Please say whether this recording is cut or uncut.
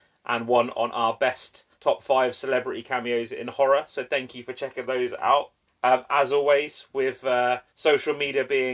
cut